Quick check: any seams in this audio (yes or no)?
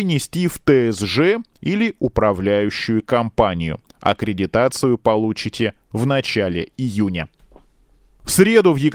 no